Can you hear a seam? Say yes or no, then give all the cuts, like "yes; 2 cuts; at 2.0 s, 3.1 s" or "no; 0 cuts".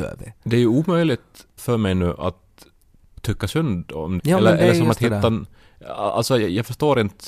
yes; 2 cuts; at 1.6 s, 4.2 s